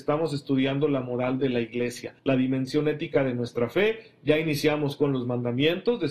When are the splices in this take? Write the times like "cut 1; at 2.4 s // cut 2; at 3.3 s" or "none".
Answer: cut 1; at 2.2 s